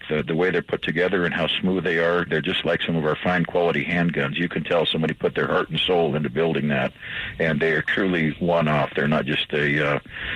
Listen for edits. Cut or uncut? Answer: cut